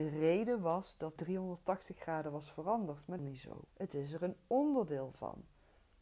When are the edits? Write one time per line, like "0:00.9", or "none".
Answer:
0:01.2
0:03.2
0:03.7